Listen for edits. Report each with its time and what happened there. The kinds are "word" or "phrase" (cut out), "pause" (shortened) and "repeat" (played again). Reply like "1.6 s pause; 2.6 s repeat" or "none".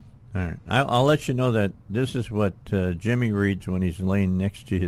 1.8 s pause